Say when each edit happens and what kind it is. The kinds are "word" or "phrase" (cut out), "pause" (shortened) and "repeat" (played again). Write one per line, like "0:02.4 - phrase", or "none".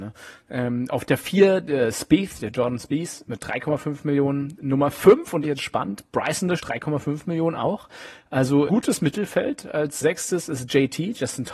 0:05.4 - phrase
0:06.6 - word
0:08.7 - word
0:10.0 - word